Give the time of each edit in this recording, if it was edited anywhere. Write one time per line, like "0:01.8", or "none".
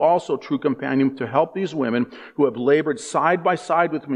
none